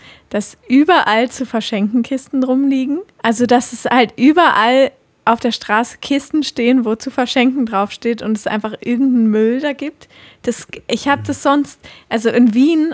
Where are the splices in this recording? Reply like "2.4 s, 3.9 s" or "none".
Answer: 3.1 s